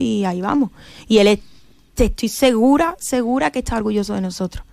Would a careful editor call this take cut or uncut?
uncut